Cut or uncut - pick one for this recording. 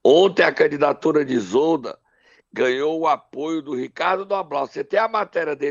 uncut